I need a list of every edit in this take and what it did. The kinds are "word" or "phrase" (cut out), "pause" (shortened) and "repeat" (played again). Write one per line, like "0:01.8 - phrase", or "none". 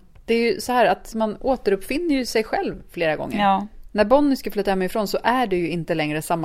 none